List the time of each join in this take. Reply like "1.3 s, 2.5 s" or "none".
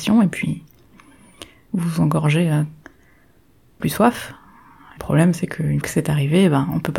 3.8 s, 5.0 s, 5.8 s